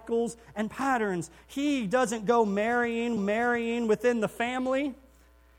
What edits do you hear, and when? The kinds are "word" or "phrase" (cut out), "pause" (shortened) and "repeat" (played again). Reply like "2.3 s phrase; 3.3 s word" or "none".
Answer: 3.2 s repeat